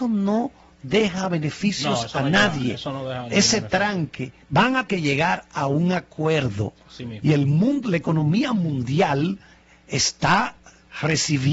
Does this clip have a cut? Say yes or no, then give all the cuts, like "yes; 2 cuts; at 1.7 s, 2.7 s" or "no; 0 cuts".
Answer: yes; 3 cuts; at 4.4 s, 4.9 s, 9.5 s